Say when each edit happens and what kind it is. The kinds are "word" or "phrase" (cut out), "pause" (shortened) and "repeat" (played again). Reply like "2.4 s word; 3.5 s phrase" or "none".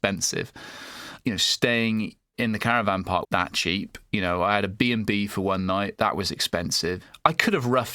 3.2 s word